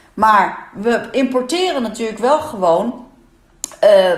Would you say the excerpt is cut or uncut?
uncut